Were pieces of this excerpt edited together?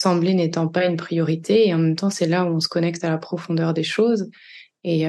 no; 0 cuts

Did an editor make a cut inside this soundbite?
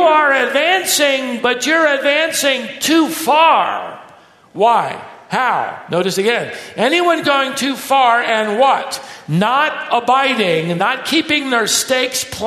no; 0 cuts

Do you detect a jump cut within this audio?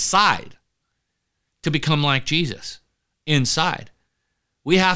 no; 0 cuts

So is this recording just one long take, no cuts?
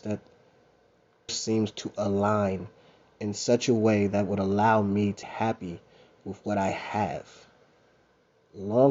no; 2 cuts; at 1.3 s, 5.2 s

